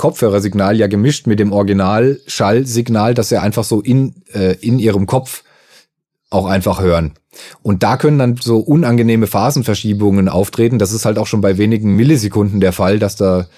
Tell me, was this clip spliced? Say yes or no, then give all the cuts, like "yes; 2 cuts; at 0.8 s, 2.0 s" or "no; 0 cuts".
no; 0 cuts